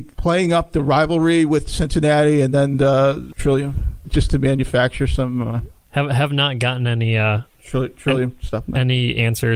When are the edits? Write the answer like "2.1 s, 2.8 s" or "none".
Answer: none